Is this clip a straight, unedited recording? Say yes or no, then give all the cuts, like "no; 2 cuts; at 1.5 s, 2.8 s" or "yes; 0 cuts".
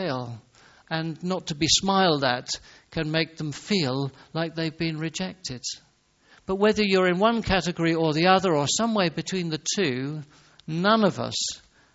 yes; 0 cuts